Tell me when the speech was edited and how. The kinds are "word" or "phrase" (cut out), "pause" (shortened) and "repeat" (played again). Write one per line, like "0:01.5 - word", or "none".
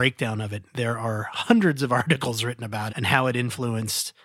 0:02.9 - word